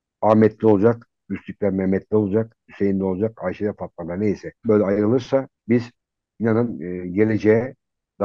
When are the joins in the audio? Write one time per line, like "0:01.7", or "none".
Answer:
0:04.6
0:05.6